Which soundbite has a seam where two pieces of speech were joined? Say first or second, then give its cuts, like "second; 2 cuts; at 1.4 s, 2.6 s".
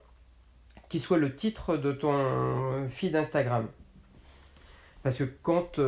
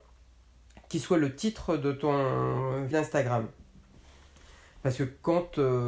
second; 1 cut; at 2.9 s